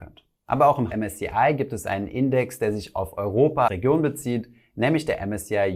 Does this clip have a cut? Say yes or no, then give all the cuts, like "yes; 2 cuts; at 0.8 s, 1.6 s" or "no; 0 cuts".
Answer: yes; 2 cuts; at 0.9 s, 3.7 s